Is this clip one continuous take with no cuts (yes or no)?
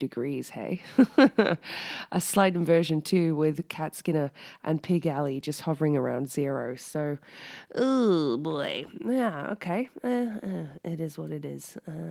yes